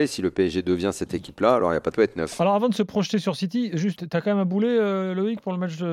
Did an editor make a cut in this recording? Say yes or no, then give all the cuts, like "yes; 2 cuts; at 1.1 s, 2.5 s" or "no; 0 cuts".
yes; 2 cuts; at 1.9 s, 4.0 s